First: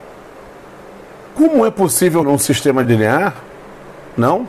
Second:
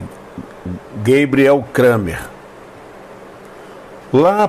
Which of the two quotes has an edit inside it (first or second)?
first